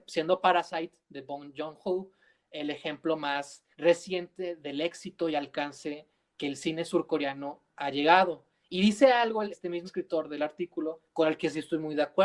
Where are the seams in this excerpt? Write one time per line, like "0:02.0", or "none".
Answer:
0:03.7
0:09.5
0:09.9